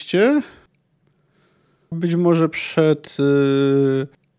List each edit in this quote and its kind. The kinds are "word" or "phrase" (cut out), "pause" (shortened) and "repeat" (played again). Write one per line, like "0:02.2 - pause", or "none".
0:01.9 - word